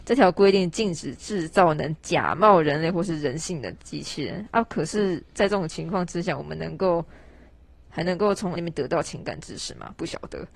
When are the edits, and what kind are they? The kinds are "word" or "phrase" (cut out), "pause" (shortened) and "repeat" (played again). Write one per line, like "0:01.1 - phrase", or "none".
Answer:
0:08.6 - word